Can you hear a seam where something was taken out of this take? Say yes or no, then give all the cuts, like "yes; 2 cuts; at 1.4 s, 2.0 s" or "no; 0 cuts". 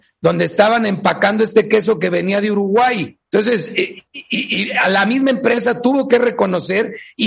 yes; 2 cuts; at 3.3 s, 4.1 s